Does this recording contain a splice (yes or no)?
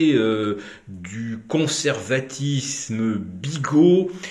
no